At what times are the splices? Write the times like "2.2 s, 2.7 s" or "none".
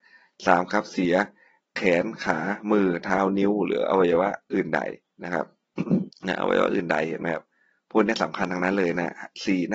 5.1 s, 6.1 s